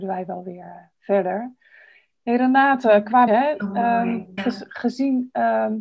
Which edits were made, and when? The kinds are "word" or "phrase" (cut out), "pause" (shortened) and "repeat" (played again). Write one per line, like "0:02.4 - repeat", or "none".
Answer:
0:03.3 - word
0:04.4 - word